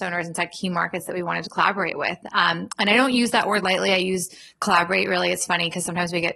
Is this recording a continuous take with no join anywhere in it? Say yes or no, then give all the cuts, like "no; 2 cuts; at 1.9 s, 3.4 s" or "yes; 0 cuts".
yes; 0 cuts